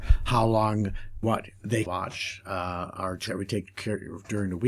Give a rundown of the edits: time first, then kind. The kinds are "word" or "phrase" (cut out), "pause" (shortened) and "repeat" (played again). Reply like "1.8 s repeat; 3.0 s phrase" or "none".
1.2 s word; 1.9 s word; 3.3 s word